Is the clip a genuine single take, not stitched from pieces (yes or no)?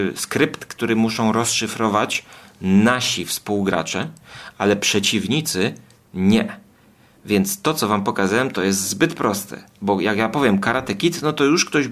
yes